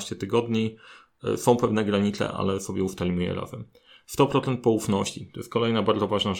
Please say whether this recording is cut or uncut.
uncut